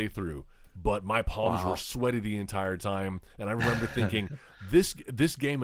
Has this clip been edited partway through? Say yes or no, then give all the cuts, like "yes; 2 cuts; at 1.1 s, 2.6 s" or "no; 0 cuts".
no; 0 cuts